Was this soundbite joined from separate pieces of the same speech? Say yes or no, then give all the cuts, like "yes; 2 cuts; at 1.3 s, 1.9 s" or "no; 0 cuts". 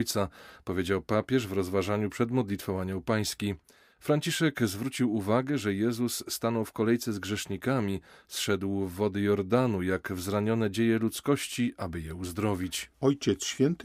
no; 0 cuts